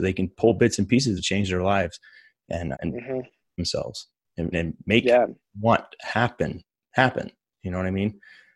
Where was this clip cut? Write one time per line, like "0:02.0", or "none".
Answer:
0:01.2
0:02.7
0:04.5